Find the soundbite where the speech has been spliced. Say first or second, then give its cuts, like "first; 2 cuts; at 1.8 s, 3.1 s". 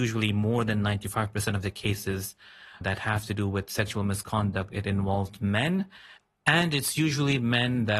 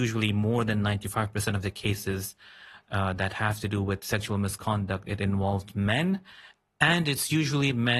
first; 1 cut; at 2.8 s